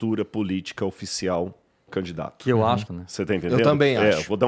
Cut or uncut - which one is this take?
cut